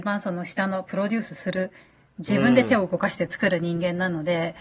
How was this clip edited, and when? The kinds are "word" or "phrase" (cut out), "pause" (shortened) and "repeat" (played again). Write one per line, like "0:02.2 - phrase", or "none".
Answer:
none